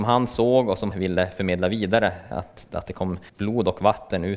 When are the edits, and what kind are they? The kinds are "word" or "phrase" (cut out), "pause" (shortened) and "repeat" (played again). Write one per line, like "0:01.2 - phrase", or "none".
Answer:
0:00.9 - word
0:02.3 - word
0:03.3 - pause

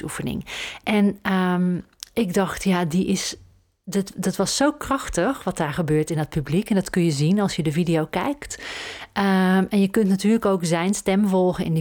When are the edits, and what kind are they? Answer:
none

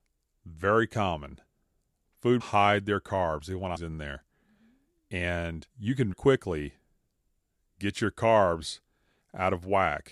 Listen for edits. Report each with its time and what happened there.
0:02.4 - phrase
0:03.8 - phrase
0:05.7 - pause
0:06.1 - word

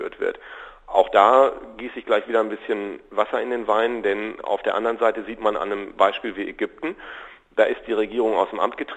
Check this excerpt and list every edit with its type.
none

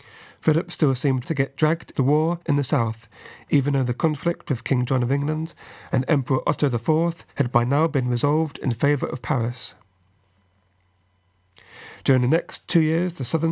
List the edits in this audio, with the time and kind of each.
0:01.2 - word
0:01.9 - word
0:02.4 - pause
0:07.3 - pause

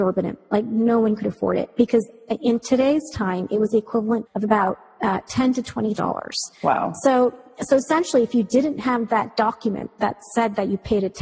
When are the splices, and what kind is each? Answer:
0:04.3 - word
0:06.0 - word

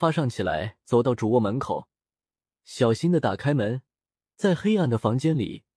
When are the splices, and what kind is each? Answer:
none

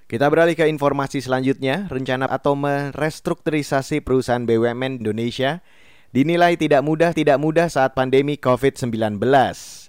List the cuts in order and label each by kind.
0:02.3 - phrase
0:05.0 - word
0:07.1 - repeat

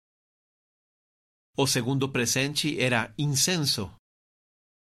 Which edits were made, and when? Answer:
none

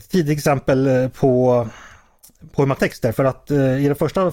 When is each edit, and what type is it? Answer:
0:02.8 - word

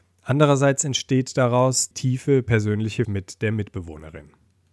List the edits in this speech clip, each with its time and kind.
0:01.9 - word
0:03.0 - word

